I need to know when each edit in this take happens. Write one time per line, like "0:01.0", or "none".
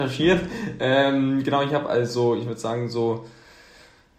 none